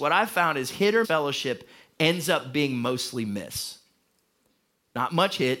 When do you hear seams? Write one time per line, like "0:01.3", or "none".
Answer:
0:01.0